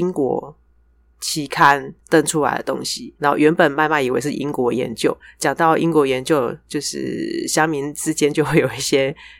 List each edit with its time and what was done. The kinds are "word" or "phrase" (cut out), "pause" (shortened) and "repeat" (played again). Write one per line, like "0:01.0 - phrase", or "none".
0:02.0 - pause
0:03.2 - pause